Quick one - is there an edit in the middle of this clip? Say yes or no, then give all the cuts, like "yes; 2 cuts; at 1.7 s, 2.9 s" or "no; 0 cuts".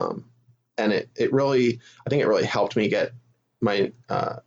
no; 0 cuts